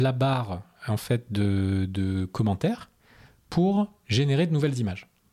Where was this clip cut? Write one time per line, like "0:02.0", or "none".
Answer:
none